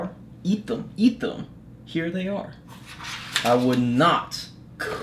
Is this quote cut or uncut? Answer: uncut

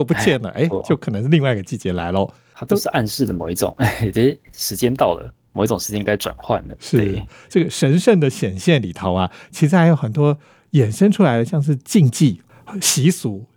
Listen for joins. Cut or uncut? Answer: uncut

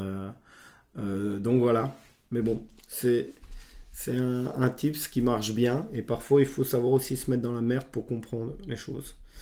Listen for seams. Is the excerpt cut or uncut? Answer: uncut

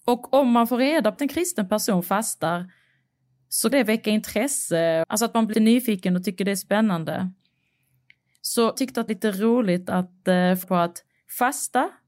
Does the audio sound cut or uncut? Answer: cut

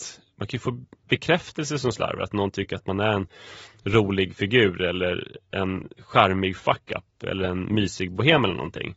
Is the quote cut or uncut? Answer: uncut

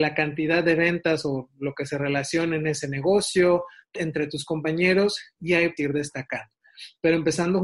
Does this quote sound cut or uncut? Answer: cut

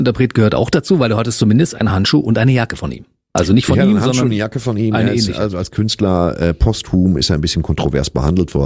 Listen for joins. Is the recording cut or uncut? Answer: uncut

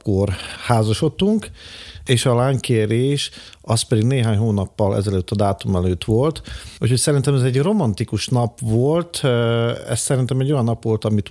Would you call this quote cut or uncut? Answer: uncut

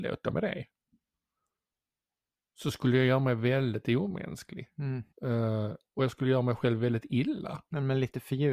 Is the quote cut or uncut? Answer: cut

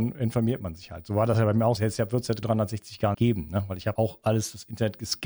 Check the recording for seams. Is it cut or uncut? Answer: cut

